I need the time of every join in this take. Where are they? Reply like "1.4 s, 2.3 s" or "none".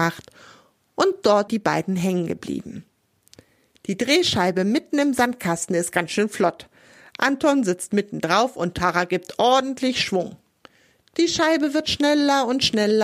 1.5 s